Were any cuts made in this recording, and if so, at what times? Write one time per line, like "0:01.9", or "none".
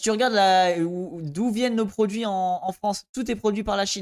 none